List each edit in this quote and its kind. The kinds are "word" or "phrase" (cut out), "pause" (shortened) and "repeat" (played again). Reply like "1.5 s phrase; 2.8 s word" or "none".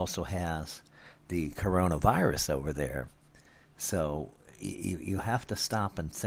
none